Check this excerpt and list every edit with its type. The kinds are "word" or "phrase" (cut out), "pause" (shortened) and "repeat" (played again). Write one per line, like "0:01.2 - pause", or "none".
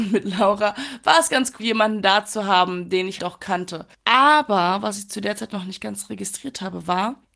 0:01.6 - word
0:03.2 - word